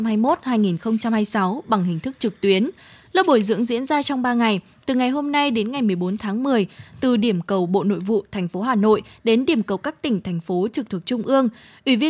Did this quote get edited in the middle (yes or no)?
no